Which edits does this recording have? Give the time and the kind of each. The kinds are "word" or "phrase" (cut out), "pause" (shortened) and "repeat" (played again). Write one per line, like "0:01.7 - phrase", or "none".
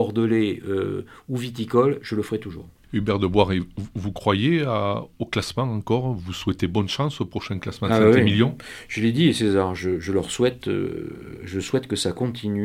none